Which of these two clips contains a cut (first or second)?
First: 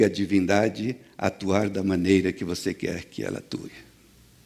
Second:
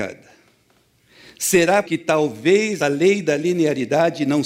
second